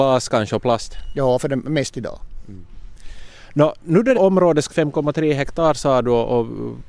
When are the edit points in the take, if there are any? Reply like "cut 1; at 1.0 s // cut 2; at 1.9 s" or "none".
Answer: cut 1; at 1.9 s // cut 2; at 4.1 s // cut 3; at 4.7 s